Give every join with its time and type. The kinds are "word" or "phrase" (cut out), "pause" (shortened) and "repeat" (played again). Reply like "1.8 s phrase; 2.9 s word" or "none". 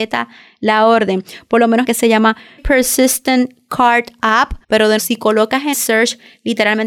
1.8 s phrase; 2.6 s word; 4.6 s pause; 5.0 s word; 5.7 s word